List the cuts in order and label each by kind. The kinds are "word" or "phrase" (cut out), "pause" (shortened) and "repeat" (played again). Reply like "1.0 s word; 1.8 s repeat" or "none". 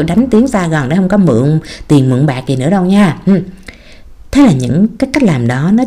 none